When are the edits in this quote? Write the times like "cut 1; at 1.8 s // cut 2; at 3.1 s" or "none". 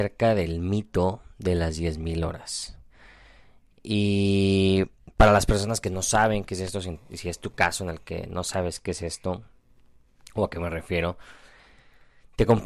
none